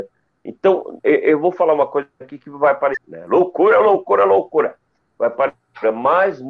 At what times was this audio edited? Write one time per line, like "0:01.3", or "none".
0:03.0